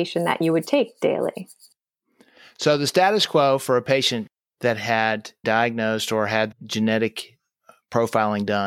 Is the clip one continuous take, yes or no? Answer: no